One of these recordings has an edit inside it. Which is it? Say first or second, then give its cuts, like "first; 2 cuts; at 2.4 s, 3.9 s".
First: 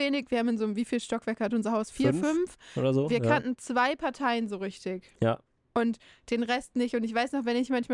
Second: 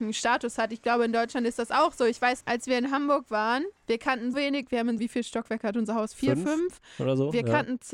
second; 4 cuts; at 2.4 s, 3.8 s, 4.3 s, 5.0 s